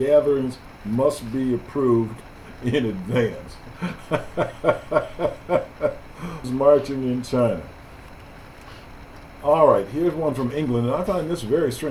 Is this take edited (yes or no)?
yes